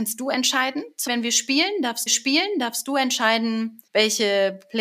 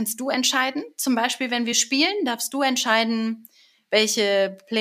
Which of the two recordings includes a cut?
first; 3 cuts; at 1.1 s, 2.1 s, 3.9 s

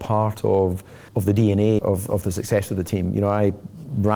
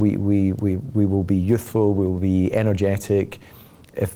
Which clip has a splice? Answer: first; 2 cuts; at 1.1 s, 1.8 s

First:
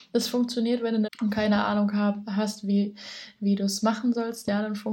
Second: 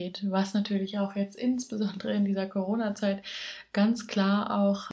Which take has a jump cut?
first; 1 cut; at 1.1 s

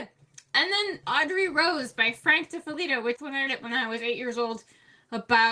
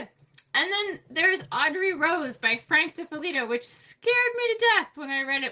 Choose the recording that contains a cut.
first; 3 cuts; at 1.0 s, 3.2 s, 3.5 s

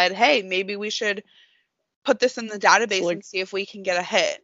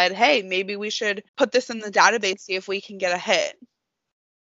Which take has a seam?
second; 2 cuts; at 1.3 s, 2.3 s

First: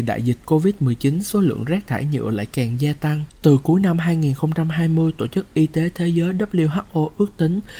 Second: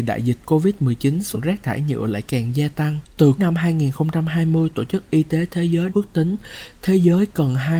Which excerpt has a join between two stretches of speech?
second; 3 cuts; at 1.3 s, 3.4 s, 5.9 s

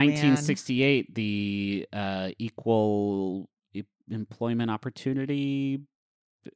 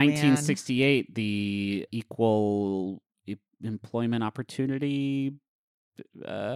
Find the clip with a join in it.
second; 1 cut; at 1.9 s

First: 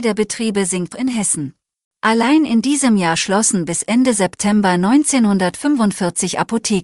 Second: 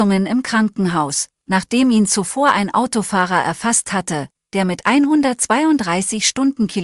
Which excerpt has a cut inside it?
first; 2 cuts; at 0.9 s, 1.7 s

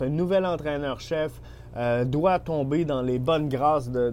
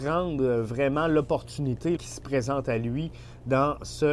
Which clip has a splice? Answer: second; 1 cut; at 2.0 s

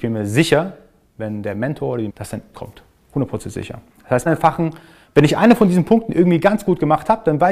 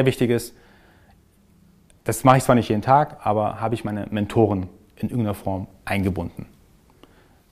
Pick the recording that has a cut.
first; 4 cuts; at 2.1 s, 2.5 s, 3.9 s, 4.3 s

